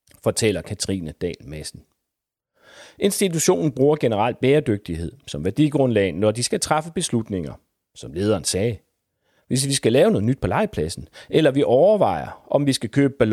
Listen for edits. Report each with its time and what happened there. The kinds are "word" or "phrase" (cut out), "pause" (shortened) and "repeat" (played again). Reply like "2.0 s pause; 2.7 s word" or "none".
none